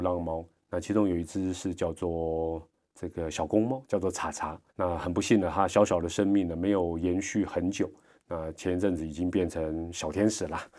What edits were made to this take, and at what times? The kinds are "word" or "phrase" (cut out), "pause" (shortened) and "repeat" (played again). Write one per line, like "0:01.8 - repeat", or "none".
0:04.7 - pause